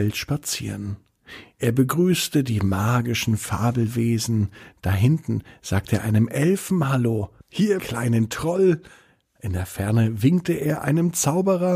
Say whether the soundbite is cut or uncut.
cut